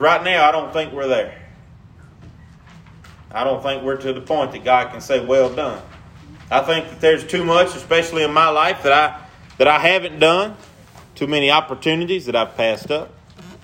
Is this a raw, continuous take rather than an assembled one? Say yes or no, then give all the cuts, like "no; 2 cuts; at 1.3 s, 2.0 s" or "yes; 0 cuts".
yes; 0 cuts